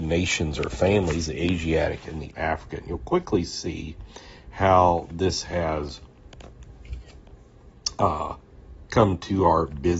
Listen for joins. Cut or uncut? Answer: uncut